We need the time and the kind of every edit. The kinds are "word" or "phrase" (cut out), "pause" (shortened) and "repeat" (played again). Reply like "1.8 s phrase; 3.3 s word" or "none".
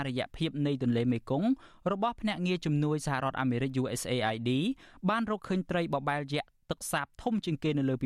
none

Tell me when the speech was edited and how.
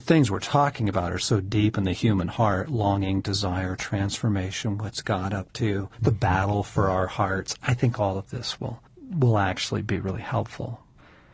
5.9 s pause; 8.9 s pause

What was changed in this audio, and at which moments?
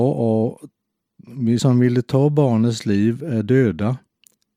1.6 s word

